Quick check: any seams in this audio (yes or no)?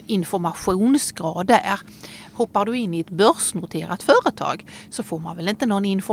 no